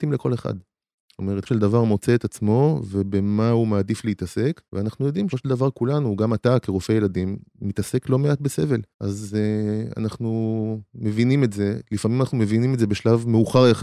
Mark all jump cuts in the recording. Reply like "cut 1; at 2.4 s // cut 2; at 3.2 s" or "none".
cut 1; at 1.5 s // cut 2; at 4.7 s // cut 3; at 5.3 s // cut 4; at 8.9 s